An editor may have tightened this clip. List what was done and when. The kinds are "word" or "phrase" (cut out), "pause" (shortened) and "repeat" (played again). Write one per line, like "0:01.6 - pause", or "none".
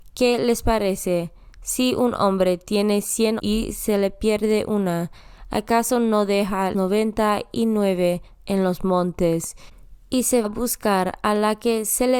0:03.4 - word
0:06.7 - word
0:10.4 - word